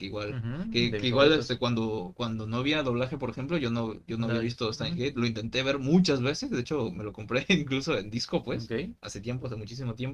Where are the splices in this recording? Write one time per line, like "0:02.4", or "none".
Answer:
none